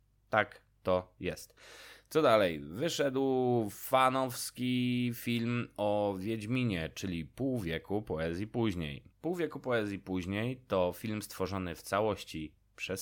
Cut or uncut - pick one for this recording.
cut